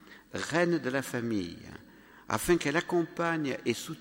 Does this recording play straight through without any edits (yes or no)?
yes